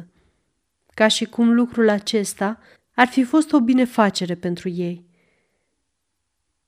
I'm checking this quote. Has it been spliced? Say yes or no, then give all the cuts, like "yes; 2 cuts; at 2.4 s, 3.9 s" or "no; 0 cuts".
yes; 1 cut; at 2.8 s